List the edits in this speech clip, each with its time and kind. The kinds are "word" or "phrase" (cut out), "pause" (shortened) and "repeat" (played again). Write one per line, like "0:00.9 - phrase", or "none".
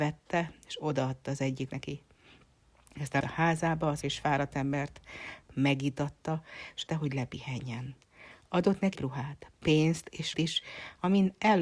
0:01.7 - word
0:03.2 - word
0:04.0 - word
0:05.5 - word
0:06.9 - word
0:08.9 - word
0:10.3 - word